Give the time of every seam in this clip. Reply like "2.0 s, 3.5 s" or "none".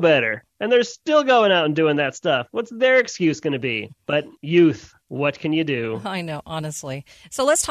4.0 s, 5.0 s